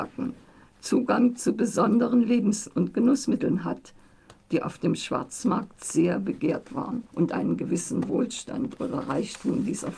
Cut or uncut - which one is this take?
cut